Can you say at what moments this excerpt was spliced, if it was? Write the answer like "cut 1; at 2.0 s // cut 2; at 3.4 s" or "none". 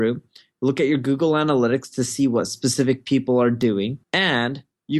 cut 1; at 4.0 s